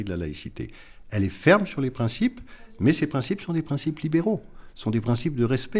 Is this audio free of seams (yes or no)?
yes